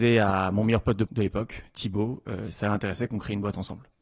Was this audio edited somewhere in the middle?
yes; 2 cuts; at 1.1 s, 2.5 s

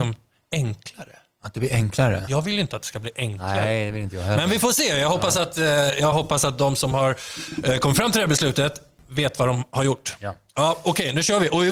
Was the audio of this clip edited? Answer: no; 0 cuts

